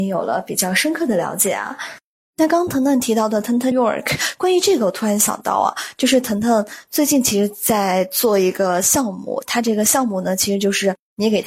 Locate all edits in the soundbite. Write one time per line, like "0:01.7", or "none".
0:03.7

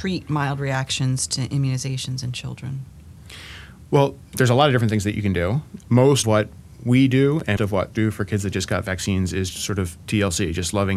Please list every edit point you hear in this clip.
0:06.2
0:07.6
0:07.9
0:09.5

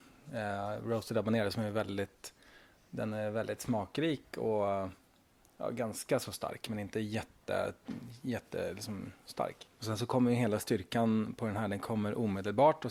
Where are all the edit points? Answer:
none

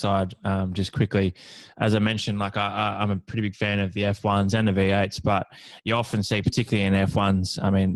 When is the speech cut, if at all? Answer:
none

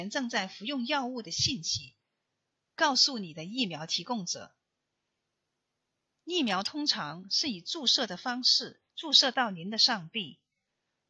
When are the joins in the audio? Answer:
0:08.9

